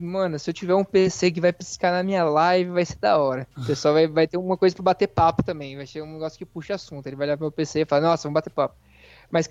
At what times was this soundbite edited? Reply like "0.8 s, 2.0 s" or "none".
3.5 s

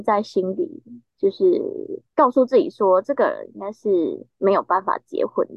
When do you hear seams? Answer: 2.1 s, 4.3 s

